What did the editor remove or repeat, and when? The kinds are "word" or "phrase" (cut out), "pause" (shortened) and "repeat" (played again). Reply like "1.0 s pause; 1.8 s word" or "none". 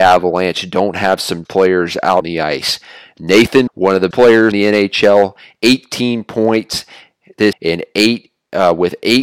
1.4 s word; 2.2 s word; 3.7 s word; 4.1 s word; 4.5 s word; 7.5 s word